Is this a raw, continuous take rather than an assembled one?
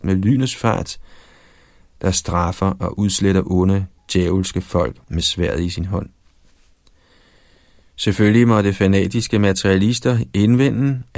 yes; 0 cuts

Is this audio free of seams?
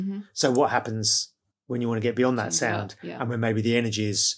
no; 1 cut; at 1.5 s

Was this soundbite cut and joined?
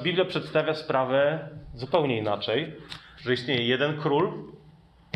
no; 0 cuts

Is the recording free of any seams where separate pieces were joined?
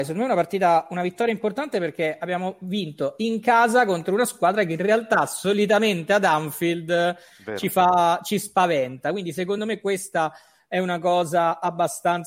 yes; 0 cuts

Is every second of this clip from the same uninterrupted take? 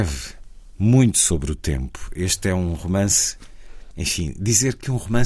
yes; 0 cuts

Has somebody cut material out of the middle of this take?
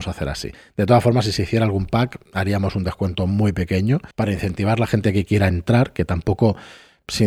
yes; 1 cut; at 4.1 s

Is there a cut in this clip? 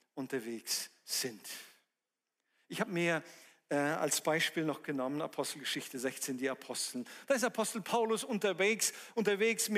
no; 0 cuts

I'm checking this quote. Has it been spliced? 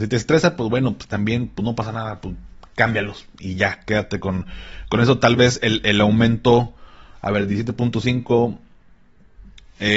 no; 0 cuts

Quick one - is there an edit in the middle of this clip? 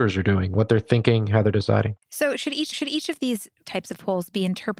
yes; 2 cuts; at 2.0 s, 2.7 s

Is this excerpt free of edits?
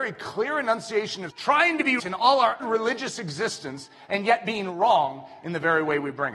no; 3 cuts; at 1.3 s, 2.0 s, 2.6 s

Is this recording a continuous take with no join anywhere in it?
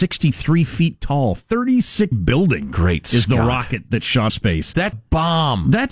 no; 3 cuts; at 2.1 s, 4.3 s, 4.9 s

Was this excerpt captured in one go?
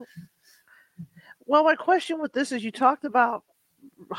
yes; 0 cuts

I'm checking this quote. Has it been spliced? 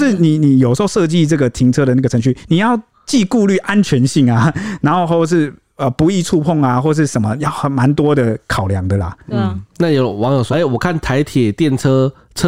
yes; 1 cut; at 10.5 s

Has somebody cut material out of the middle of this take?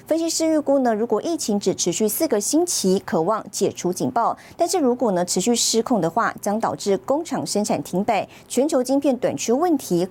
no; 0 cuts

